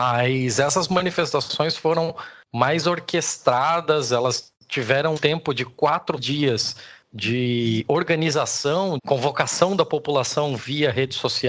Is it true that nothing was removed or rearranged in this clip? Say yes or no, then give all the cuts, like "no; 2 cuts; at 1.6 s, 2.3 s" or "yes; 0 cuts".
no; 3 cuts; at 5.2 s, 6.2 s, 9.0 s